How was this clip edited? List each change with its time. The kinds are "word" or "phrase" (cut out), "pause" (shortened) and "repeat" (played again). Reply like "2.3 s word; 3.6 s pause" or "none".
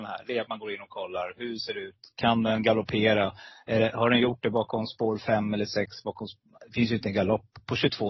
none